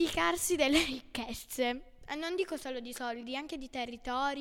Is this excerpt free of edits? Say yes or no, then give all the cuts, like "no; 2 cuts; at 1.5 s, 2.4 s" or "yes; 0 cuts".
yes; 0 cuts